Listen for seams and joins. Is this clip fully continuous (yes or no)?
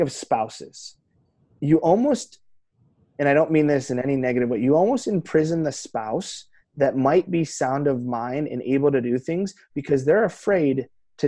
yes